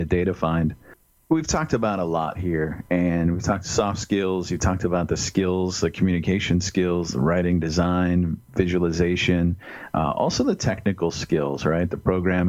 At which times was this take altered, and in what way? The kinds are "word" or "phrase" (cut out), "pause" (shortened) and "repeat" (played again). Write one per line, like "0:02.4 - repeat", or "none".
none